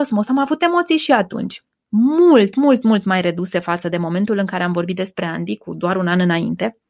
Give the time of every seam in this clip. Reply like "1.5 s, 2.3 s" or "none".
none